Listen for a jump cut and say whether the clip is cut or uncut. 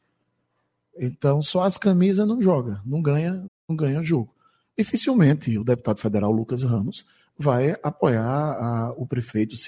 cut